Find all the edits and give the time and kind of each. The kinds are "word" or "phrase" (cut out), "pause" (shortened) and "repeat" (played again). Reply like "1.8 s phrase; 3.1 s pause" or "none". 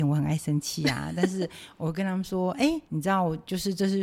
2.8 s pause